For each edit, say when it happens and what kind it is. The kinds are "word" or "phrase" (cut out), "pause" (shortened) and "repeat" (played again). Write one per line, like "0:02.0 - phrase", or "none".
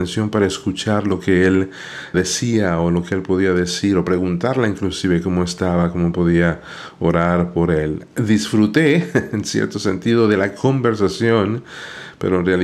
0:02.1 - word